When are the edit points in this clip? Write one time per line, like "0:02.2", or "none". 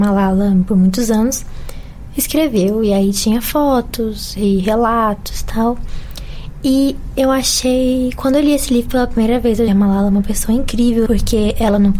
0:09.7
0:11.1

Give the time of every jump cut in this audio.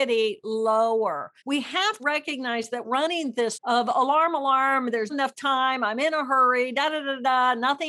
0:01.4
0:02.0
0:02.8
0:03.5
0:05.1

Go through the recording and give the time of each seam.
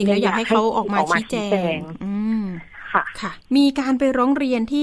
0:03.5

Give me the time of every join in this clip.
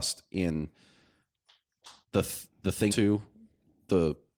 0:02.0
0:02.9

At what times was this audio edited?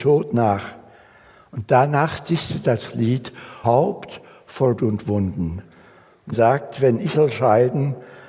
0:02.6
0:03.6
0:04.8
0:06.3
0:07.1

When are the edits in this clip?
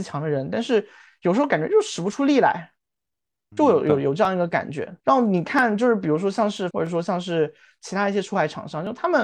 0:03.5
0:05.0
0:06.7

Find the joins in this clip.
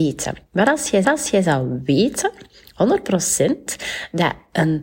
0:01.0

